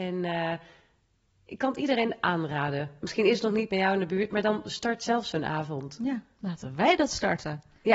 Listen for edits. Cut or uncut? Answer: uncut